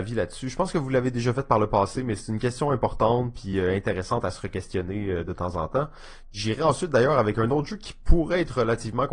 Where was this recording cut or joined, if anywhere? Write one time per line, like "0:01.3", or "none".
none